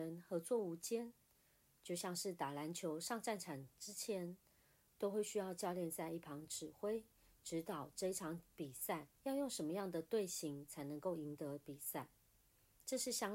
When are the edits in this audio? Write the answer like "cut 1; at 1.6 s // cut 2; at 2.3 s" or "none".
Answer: cut 1; at 9.2 s